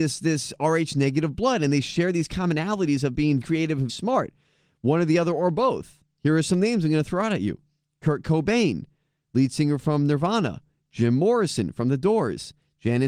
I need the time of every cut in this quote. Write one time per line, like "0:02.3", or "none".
0:03.4
0:03.9

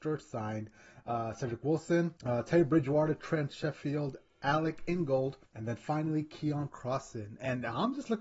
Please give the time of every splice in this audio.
0:02.2
0:05.4

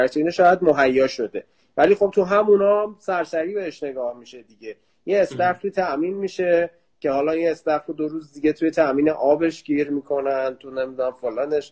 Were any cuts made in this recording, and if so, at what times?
none

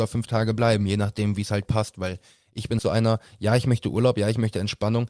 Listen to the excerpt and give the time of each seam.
0:02.8

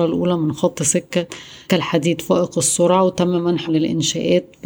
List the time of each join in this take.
0:01.7
0:03.7

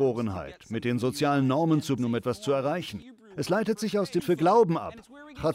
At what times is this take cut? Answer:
0:02.0
0:04.2

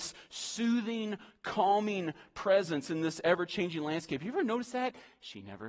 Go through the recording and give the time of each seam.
none

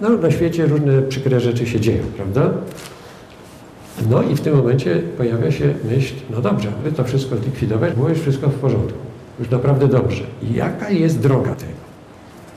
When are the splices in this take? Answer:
0:06.8
0:07.9
0:11.5

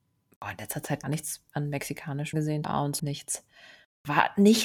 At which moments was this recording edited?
0:01.0
0:02.3
0:02.6
0:03.0

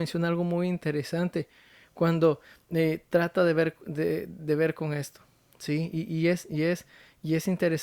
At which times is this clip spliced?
none

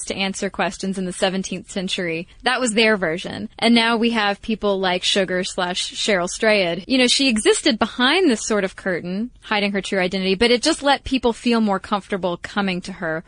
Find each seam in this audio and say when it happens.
0:02.3
0:03.5
0:06.8

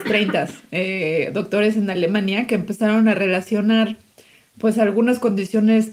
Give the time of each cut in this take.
none

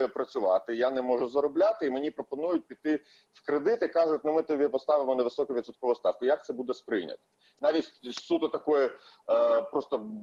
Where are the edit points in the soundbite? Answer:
none

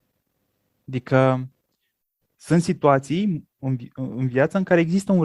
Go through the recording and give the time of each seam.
none

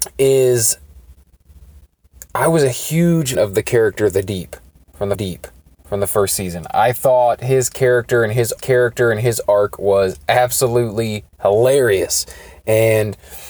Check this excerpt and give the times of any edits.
0:03.3
0:05.1
0:08.6
0:11.3

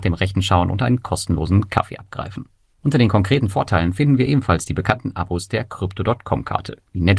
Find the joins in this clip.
none

